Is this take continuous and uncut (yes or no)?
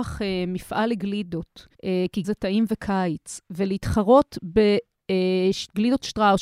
no